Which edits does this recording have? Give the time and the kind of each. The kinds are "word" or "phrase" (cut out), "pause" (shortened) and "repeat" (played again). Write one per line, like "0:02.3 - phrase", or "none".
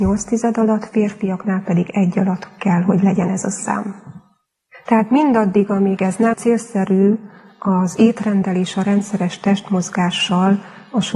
0:04.5 - pause
0:06.3 - phrase

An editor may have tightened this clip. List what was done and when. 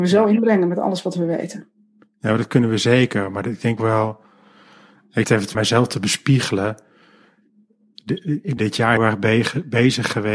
0:03.8 - word
0:05.2 - word
0:05.5 - word
0:08.6 - word
0:09.0 - word

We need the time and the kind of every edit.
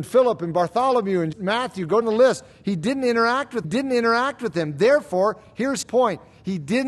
0:01.3 - word
0:02.0 - word
0:03.6 - repeat
0:05.8 - word

